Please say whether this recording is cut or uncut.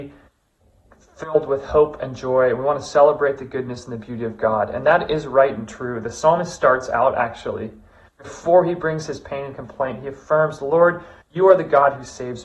uncut